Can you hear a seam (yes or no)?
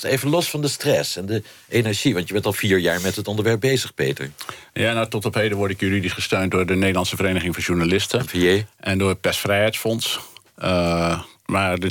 yes